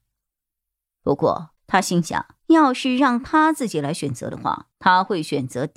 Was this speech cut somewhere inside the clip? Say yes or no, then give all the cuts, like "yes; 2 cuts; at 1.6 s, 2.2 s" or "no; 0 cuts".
yes; 3 cuts; at 1.6 s, 2.4 s, 4.7 s